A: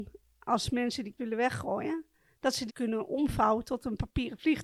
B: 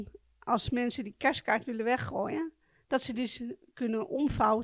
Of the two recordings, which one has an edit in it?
A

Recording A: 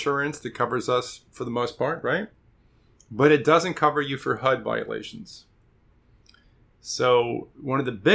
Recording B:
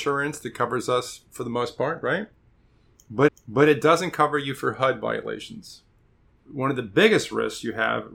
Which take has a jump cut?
B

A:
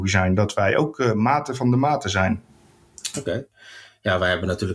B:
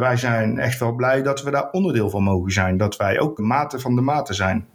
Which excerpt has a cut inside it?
B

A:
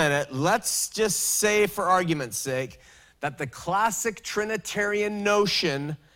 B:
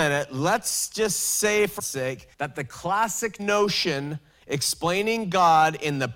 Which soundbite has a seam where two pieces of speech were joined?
B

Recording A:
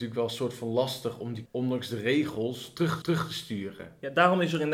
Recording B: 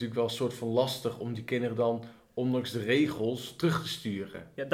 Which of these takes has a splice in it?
A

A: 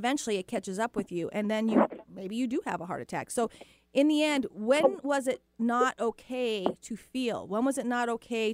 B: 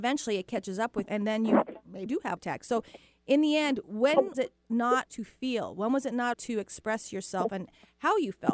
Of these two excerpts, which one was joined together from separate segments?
B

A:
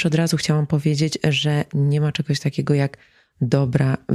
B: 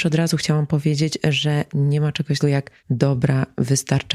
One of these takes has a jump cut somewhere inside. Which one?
B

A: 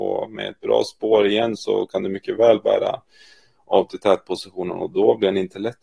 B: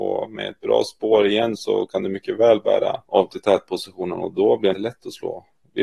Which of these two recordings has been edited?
B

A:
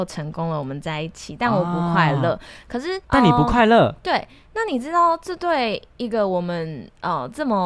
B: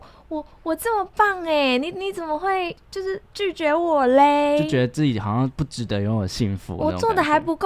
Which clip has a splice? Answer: A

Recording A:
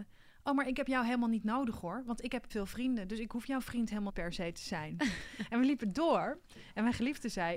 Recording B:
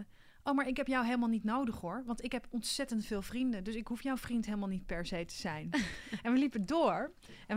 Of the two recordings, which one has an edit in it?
A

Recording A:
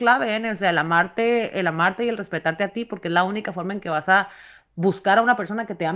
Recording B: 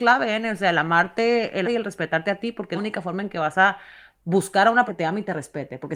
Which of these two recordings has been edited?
B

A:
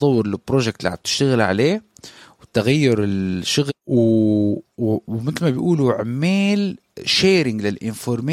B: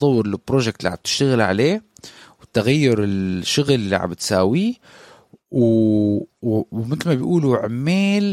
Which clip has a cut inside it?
A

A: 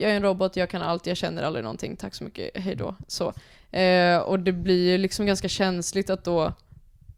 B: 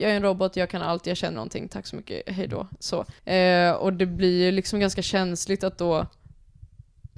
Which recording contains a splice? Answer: B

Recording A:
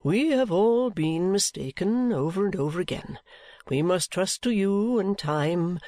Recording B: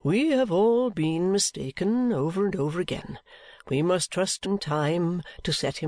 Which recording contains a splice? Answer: B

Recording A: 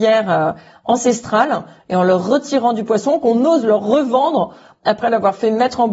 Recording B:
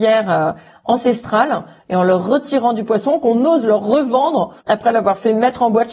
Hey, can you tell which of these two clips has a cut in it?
B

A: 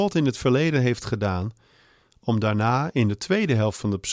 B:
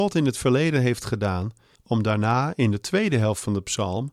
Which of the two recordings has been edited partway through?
B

